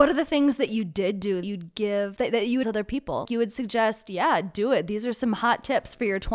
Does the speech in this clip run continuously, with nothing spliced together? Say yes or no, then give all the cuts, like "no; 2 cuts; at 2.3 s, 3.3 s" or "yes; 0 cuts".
no; 3 cuts; at 1.4 s, 2.6 s, 3.2 s